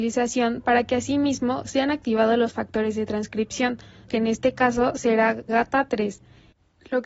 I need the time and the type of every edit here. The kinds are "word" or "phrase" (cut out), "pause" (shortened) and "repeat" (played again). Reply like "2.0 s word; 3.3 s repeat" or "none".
4.1 s word; 5.5 s word